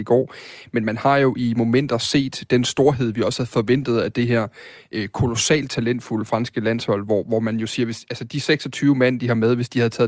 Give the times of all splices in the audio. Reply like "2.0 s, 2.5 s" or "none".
none